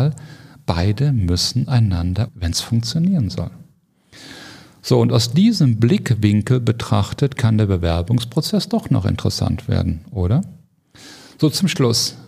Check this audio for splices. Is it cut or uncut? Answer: cut